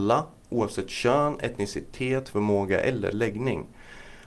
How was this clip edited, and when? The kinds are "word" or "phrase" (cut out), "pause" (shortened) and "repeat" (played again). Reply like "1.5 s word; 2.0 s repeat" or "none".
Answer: 2.3 s word; 3.1 s word